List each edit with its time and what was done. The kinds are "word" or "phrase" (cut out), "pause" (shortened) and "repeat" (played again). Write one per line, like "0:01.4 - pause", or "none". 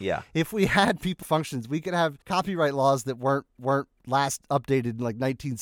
0:01.2 - word
0:02.2 - pause
0:03.6 - repeat